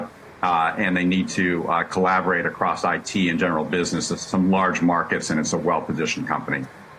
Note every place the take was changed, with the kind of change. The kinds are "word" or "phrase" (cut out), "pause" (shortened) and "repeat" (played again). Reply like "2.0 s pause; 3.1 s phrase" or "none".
none